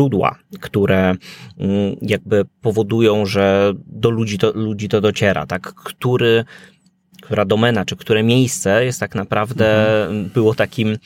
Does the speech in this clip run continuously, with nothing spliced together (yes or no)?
yes